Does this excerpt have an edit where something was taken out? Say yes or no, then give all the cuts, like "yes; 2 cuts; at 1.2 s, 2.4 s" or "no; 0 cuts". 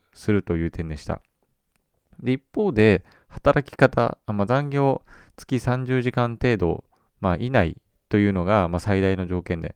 no; 0 cuts